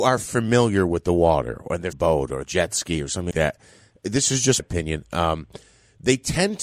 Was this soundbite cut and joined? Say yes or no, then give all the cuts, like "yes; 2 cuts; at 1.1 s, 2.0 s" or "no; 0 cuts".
yes; 4 cuts; at 1.9 s, 2.4 s, 3.3 s, 4.6 s